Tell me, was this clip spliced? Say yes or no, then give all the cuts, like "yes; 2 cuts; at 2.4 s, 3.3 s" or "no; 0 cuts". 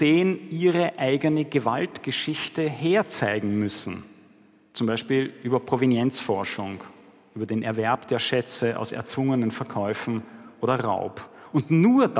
no; 0 cuts